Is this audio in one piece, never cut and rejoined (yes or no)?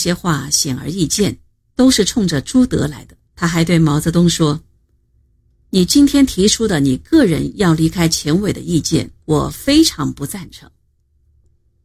no